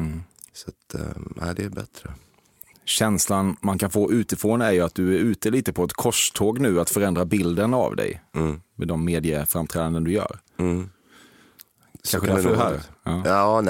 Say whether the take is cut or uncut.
uncut